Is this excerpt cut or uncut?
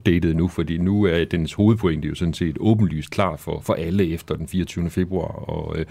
uncut